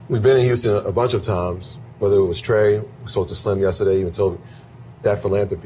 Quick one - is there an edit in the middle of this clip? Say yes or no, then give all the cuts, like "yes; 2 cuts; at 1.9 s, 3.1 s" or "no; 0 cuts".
no; 0 cuts